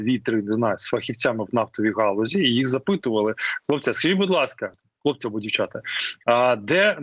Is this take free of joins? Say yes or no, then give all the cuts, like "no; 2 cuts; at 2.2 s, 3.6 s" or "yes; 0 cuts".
yes; 0 cuts